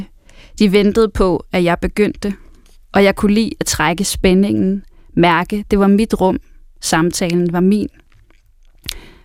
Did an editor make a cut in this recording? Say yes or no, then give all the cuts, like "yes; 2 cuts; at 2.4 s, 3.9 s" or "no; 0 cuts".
no; 0 cuts